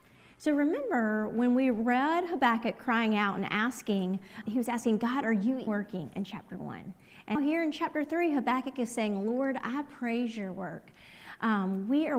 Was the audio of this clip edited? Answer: yes; 3 cuts; at 4.4 s, 5.7 s, 7.4 s

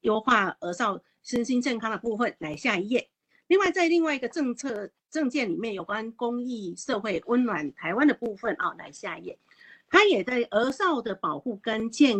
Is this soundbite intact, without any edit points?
yes; 0 cuts

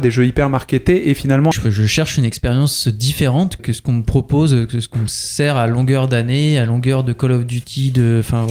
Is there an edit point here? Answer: yes; 2 cuts; at 1.5 s, 3.6 s

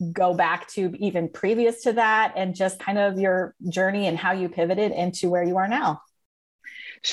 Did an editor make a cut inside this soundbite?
no; 0 cuts

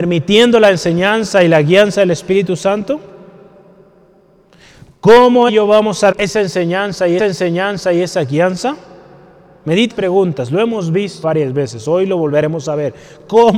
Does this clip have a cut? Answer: yes; 5 cuts; at 5.5 s, 6.1 s, 7.2 s, 9.9 s, 11.2 s

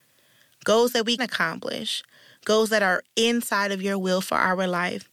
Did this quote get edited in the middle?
yes; 1 cut; at 1.2 s

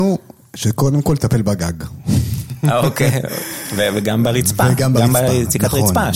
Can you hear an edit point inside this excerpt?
no; 0 cuts

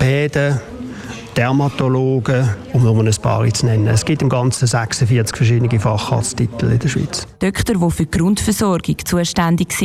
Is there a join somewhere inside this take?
no; 0 cuts

